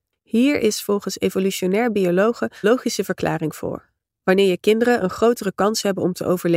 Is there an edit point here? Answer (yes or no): yes